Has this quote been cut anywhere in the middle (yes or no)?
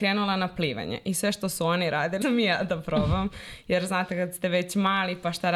yes